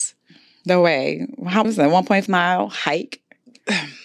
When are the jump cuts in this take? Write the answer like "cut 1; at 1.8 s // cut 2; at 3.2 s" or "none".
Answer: cut 1; at 1.6 s // cut 2; at 2.3 s